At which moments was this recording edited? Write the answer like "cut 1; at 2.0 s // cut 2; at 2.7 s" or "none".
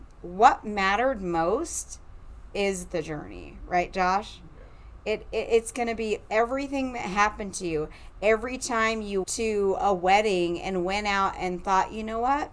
cut 1; at 9.2 s